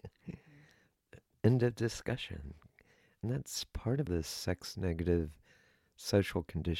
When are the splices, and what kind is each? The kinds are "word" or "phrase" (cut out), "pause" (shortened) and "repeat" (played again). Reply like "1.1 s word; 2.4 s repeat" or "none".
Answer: 4.1 s word